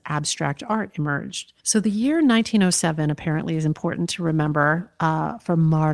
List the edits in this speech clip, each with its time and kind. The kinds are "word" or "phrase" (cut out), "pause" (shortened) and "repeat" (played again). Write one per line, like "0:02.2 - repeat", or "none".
0:01.6 - pause